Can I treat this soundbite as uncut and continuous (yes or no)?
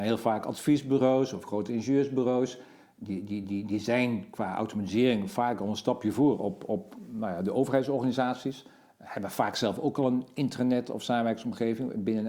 yes